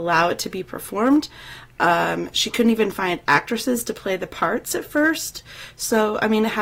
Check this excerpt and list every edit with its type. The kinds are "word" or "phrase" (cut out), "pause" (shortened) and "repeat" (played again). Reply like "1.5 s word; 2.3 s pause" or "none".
none